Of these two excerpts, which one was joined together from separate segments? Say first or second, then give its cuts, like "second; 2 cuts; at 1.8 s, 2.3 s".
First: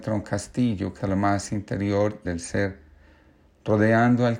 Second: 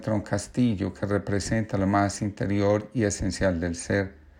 first; 2 cuts; at 1.0 s, 2.2 s